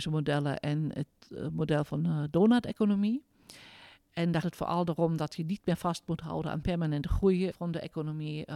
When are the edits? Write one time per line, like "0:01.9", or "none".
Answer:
0:04.4
0:07.5